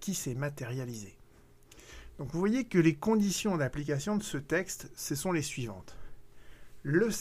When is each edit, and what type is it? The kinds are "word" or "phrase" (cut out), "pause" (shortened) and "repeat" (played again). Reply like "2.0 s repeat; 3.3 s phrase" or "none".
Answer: none